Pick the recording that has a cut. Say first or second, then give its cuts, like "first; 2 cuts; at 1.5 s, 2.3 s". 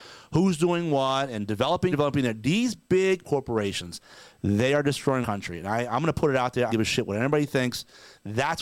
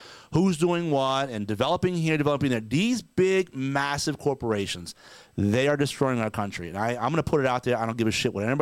first; 4 cuts; at 1.9 s, 3.2 s, 5.2 s, 6.7 s